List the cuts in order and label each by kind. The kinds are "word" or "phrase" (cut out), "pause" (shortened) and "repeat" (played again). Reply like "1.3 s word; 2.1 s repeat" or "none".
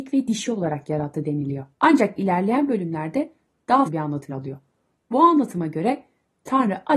1.7 s pause; 3.9 s word; 4.3 s word